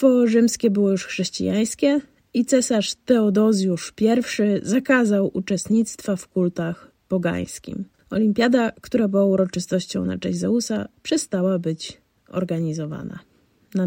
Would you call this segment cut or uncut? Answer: uncut